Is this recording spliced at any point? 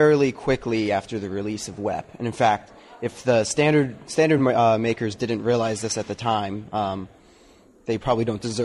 no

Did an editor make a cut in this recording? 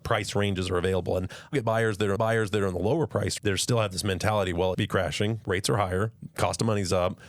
yes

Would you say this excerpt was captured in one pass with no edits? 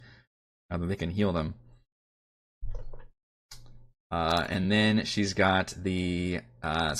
yes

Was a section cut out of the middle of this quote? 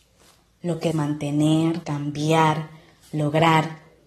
yes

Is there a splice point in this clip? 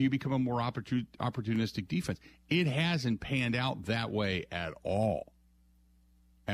no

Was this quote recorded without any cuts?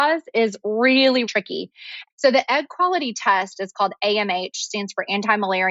no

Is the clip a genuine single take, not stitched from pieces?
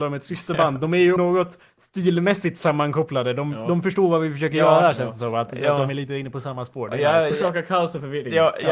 no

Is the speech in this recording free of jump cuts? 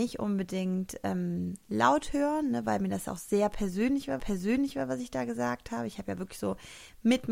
no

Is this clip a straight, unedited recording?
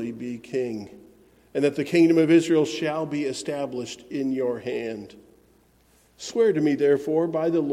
yes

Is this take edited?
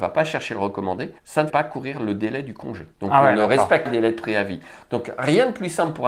yes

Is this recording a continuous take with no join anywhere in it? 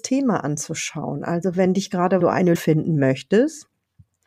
no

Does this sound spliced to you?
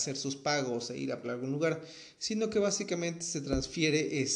yes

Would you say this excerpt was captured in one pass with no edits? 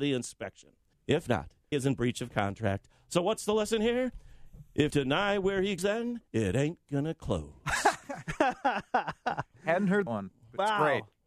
no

